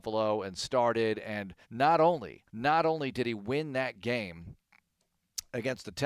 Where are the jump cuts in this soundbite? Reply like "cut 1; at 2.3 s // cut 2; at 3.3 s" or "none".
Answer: cut 1; at 1.6 s // cut 2; at 2.5 s